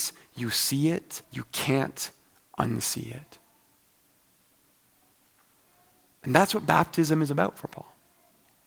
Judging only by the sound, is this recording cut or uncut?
cut